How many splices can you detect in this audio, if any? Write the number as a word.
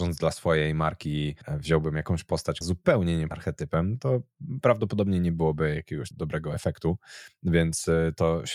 four